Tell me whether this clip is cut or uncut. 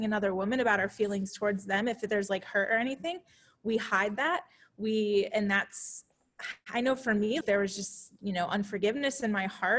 cut